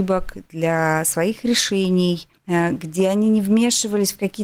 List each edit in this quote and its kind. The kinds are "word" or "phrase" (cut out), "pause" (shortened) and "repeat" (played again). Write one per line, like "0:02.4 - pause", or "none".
0:02.4 - pause